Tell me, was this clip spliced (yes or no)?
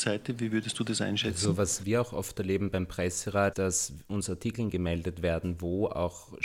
yes